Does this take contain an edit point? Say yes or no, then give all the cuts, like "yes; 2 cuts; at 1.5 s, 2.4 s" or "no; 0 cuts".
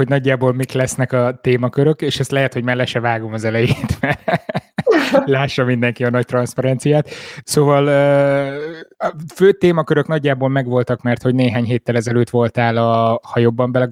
no; 0 cuts